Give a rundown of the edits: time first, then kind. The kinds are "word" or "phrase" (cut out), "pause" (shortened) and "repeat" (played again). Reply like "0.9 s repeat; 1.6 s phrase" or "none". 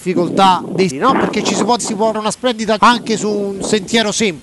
0.9 s word; 1.8 s word; 2.1 s word; 2.8 s word